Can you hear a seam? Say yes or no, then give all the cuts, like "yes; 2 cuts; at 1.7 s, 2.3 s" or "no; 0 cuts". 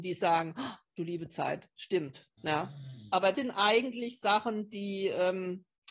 yes; 2 cuts; at 2.4 s, 3.3 s